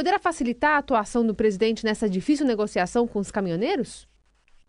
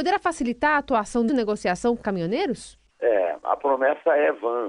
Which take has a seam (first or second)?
second